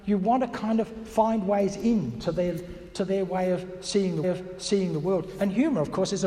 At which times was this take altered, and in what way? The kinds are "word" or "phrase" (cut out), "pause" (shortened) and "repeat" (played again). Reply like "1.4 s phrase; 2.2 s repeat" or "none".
4.2 s repeat